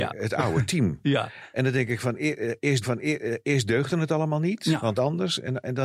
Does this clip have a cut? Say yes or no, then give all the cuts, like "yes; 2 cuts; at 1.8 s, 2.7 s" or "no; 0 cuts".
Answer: yes; 2 cuts; at 2.8 s, 5.0 s